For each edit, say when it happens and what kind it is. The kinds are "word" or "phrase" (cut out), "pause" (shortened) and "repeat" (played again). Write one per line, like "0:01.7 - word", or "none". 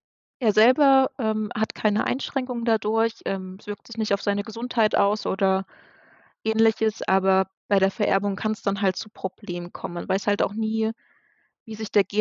none